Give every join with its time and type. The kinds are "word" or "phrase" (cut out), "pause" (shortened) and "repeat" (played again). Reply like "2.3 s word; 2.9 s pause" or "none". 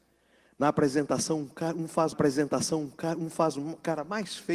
2.1 s repeat